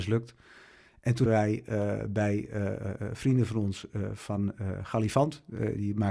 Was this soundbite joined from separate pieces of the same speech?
yes; 1 cut; at 1.3 s

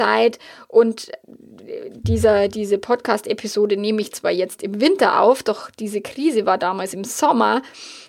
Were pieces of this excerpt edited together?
no; 0 cuts

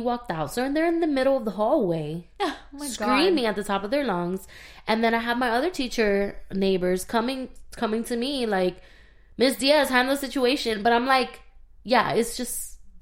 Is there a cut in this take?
no; 0 cuts

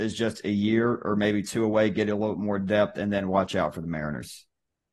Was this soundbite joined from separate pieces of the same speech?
no; 0 cuts

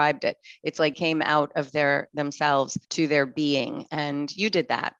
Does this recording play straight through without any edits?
no; 2 cuts; at 0.9 s, 2.8 s

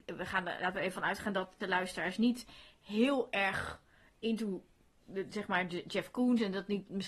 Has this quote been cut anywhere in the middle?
yes; 1 cut; at 1.6 s

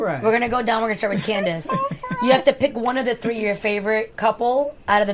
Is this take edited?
no; 0 cuts

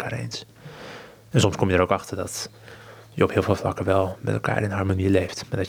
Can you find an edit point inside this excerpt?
no; 0 cuts

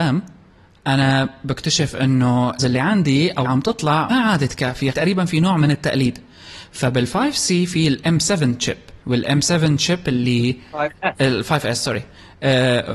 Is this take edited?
yes; 5 cuts; at 2.6 s, 3.4 s, 4.1 s, 4.9 s, 9.0 s

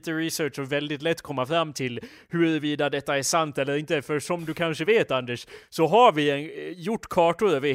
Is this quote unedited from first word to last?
yes; 0 cuts

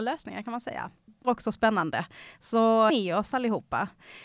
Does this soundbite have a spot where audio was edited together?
yes; 2 cuts; at 1.2 s, 2.9 s

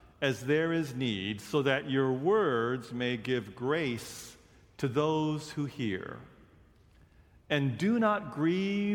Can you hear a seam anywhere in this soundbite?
no; 0 cuts

